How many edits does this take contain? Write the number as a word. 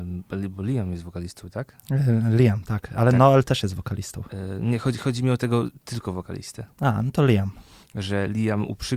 zero